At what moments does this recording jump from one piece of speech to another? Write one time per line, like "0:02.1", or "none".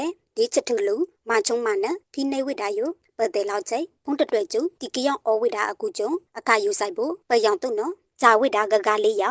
0:02.0